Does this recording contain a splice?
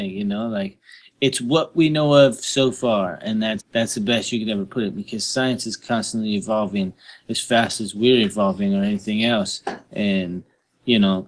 yes; 1 cut; at 3.6 s

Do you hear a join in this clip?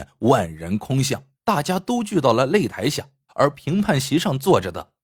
yes; 2 cuts; at 1.3 s, 3.3 s

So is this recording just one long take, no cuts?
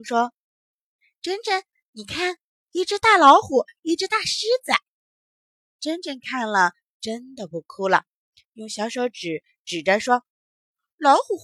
no; 1 cut; at 10.3 s

